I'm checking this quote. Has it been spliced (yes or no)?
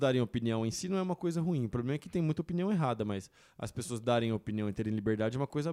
no